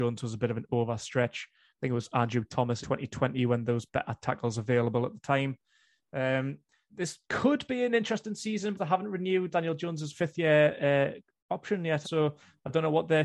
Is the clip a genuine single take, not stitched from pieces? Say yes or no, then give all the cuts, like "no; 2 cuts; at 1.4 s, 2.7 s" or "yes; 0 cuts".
no; 6 cuts; at 2.8 s, 3.9 s, 6.9 s, 8.8 s, 9.5 s, 12.0 s